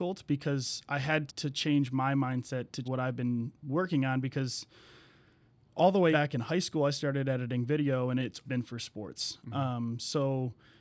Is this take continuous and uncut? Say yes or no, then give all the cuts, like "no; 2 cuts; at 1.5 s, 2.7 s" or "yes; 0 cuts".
no; 4 cuts; at 1.3 s, 2.8 s, 6.1 s, 8.4 s